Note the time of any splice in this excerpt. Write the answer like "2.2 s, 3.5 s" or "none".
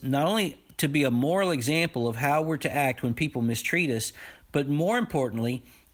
none